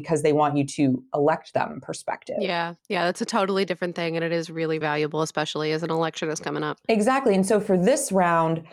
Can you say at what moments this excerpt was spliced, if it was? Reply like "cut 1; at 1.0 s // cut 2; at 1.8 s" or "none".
cut 1; at 2.8 s // cut 2; at 4.8 s